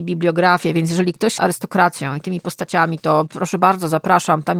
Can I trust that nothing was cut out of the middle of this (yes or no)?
no